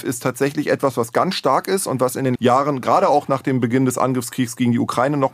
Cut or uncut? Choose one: cut